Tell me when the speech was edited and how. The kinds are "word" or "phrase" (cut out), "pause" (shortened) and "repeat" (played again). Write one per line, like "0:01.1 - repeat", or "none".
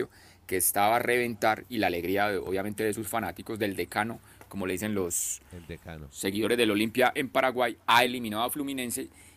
none